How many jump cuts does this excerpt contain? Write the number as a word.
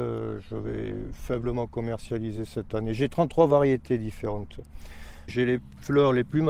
zero